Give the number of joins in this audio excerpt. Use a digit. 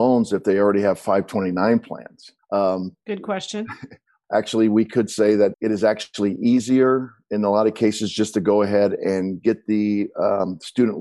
3